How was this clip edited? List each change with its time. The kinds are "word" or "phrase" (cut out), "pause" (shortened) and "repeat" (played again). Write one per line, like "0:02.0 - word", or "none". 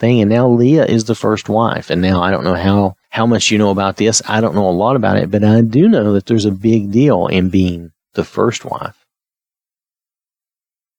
0:03.0 - pause